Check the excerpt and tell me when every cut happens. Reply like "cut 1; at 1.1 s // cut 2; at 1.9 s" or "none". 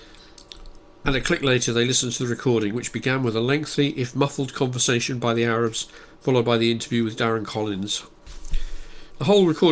none